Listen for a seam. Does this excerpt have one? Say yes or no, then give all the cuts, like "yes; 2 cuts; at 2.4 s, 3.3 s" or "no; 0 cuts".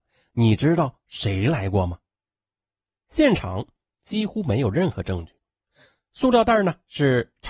no; 0 cuts